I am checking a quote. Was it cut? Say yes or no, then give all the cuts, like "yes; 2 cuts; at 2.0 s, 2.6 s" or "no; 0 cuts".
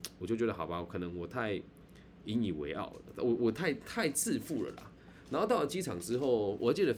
no; 0 cuts